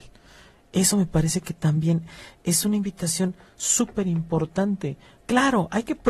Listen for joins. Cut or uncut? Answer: uncut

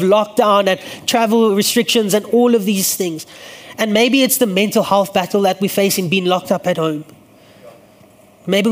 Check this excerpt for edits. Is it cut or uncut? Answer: uncut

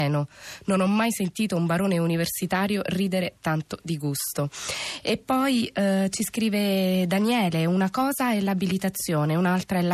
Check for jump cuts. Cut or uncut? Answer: uncut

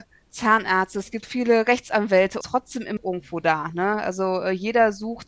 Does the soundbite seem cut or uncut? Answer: cut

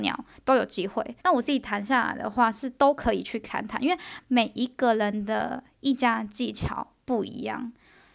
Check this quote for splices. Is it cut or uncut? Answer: cut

